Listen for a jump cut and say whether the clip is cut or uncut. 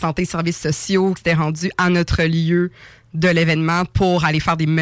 cut